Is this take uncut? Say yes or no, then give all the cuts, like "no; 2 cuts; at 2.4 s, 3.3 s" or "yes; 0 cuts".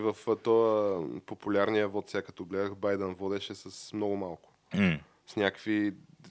yes; 0 cuts